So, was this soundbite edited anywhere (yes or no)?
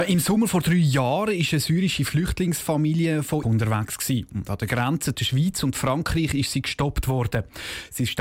yes